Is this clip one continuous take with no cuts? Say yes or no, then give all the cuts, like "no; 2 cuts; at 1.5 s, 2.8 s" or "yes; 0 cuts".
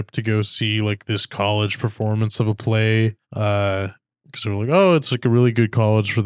no; 1 cut; at 3.2 s